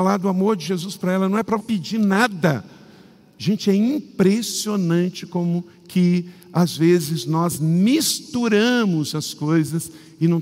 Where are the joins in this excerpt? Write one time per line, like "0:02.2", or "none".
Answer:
0:01.6